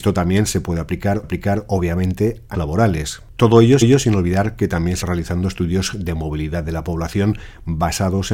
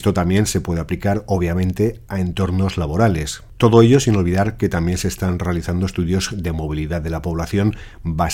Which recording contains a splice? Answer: first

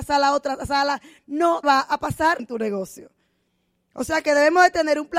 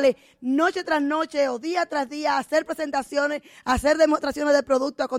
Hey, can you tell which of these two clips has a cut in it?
first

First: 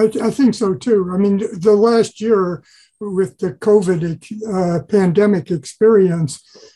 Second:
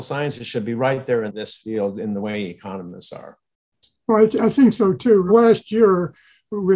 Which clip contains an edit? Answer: second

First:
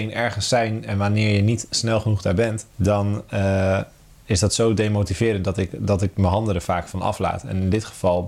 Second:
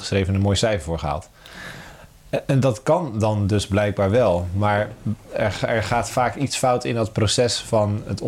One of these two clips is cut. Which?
first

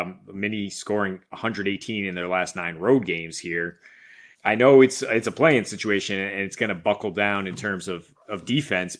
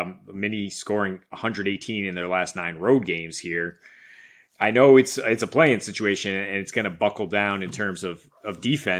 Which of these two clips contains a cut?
first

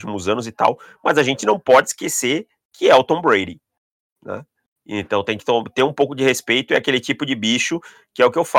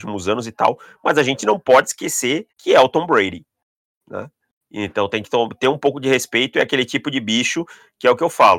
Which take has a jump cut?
second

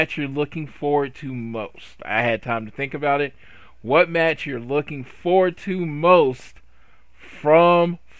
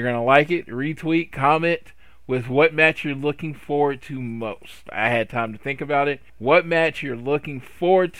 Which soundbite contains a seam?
second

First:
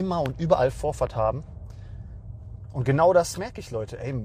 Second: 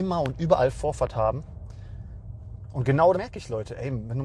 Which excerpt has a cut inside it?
second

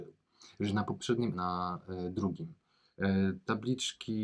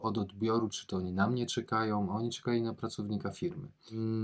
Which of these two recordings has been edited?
first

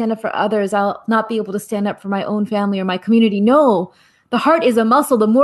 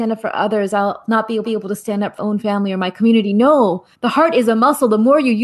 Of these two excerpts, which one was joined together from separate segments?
second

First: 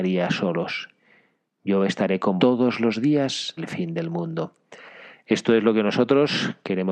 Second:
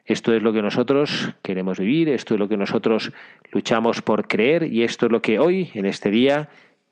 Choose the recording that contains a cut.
first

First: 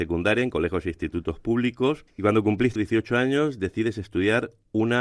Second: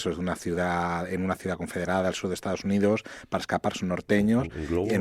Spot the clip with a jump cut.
first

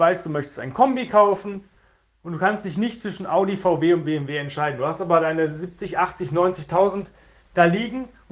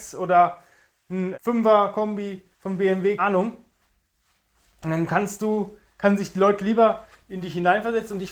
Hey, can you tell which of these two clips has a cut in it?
second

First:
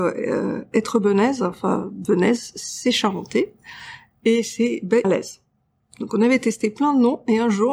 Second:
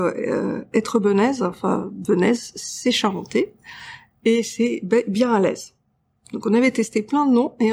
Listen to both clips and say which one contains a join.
first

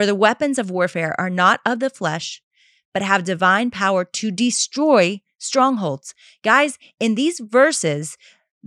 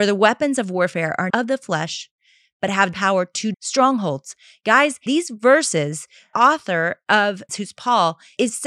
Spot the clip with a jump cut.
second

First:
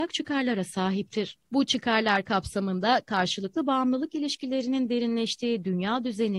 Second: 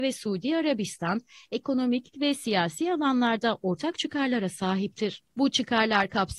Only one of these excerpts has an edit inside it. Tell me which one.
second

